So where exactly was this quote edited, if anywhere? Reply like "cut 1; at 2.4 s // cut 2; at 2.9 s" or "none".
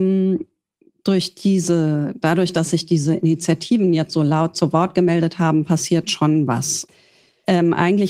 none